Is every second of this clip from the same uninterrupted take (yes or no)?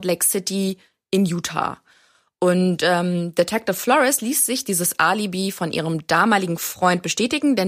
yes